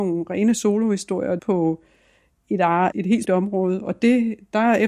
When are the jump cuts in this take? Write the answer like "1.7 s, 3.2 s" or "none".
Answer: 1.4 s, 2.9 s, 3.2 s